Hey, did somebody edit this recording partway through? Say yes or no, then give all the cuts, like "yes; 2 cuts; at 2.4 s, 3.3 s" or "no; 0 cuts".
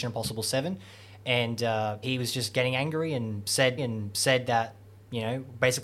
yes; 2 cuts; at 2.0 s, 3.8 s